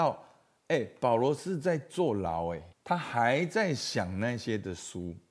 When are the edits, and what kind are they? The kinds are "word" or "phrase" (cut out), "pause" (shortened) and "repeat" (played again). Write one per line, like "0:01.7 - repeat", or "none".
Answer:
0:02.7 - pause